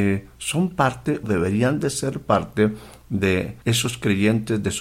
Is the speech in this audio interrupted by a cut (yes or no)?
yes